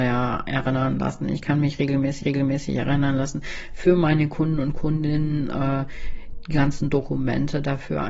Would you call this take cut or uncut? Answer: cut